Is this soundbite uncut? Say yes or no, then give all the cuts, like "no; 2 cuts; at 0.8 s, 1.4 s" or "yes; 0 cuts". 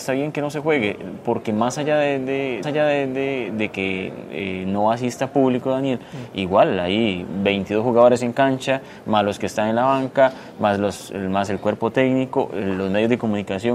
no; 1 cut; at 2.6 s